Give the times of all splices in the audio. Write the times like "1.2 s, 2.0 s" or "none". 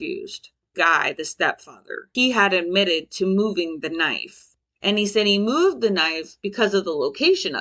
none